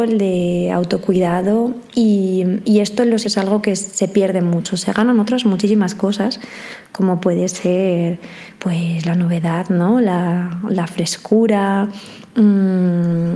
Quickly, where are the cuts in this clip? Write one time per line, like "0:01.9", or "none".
0:03.2

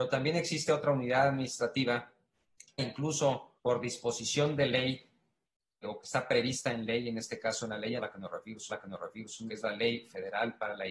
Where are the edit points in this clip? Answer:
0:02.8
0:03.6
0:05.8
0:08.0
0:08.7
0:09.5

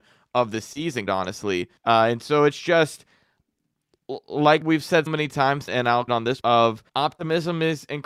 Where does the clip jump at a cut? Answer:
0:01.1
0:01.8
0:04.6
0:05.1
0:05.7
0:06.1
0:06.4
0:06.9

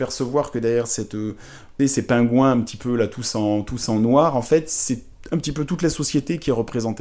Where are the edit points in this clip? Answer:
0:01.8

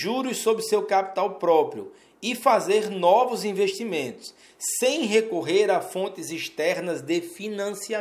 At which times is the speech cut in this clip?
none

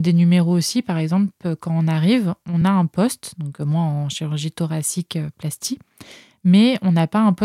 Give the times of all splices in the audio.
none

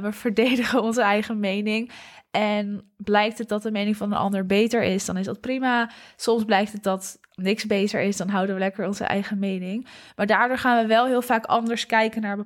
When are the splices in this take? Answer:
none

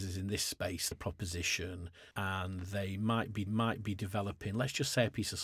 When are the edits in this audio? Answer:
0:00.9
0:02.1
0:03.5

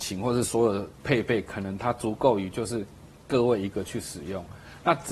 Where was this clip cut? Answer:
0:00.9

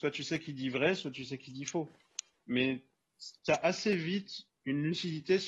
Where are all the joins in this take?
0:03.4

